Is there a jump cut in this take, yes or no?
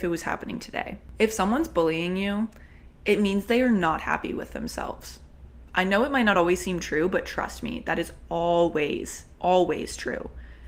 no